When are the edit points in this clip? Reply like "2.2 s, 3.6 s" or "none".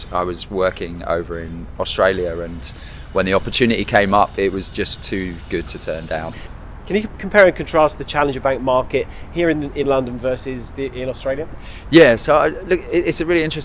none